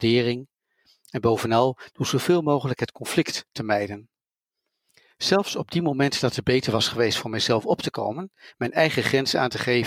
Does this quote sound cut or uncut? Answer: uncut